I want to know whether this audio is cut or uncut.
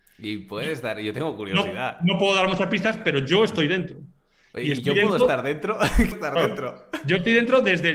cut